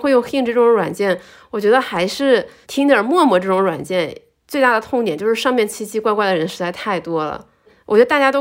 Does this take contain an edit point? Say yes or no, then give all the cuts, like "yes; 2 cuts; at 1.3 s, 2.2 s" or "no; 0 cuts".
no; 0 cuts